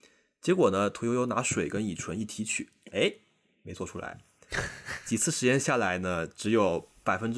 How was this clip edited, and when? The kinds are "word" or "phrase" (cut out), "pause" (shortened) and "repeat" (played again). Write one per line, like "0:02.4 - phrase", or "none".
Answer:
none